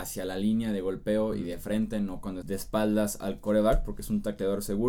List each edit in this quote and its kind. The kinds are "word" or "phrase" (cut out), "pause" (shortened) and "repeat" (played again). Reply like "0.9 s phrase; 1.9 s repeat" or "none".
2.4 s word